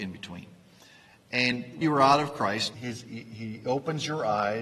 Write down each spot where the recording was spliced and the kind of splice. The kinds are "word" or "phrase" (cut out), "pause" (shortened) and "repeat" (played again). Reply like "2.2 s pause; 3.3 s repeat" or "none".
1.8 s word; 2.7 s word